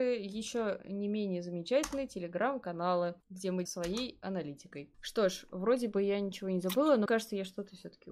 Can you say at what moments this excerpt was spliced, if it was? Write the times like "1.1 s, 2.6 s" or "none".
3.2 s, 3.7 s, 4.9 s, 7.1 s